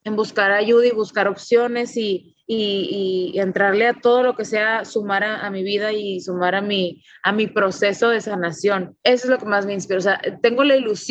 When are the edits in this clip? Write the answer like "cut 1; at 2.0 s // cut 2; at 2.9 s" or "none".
cut 1; at 2.4 s // cut 2; at 9.0 s